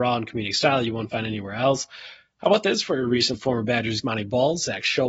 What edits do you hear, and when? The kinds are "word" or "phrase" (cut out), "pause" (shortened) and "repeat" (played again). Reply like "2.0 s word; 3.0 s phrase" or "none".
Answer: 3.3 s word; 4.0 s word